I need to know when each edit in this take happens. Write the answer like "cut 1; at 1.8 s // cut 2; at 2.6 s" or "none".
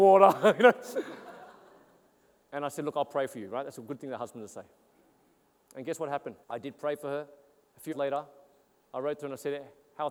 cut 1; at 6.4 s // cut 2; at 7.9 s